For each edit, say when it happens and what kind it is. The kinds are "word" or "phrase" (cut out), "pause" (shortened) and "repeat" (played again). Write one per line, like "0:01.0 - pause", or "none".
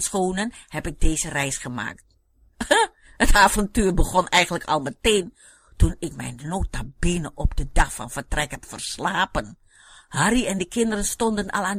none